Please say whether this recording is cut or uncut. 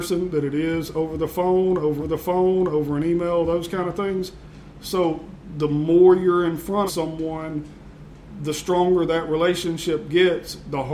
cut